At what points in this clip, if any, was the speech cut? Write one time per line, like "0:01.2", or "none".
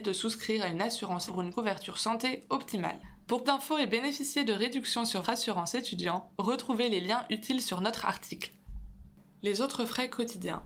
0:01.3
0:03.4
0:05.2